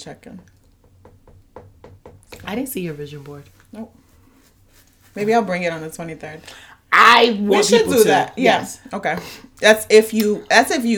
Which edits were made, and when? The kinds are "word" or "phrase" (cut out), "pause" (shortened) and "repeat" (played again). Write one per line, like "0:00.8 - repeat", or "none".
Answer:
none